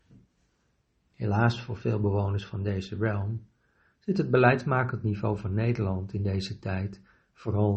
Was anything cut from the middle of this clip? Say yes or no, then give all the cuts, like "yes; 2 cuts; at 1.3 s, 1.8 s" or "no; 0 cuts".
no; 0 cuts